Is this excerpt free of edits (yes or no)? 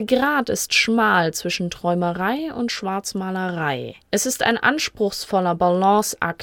no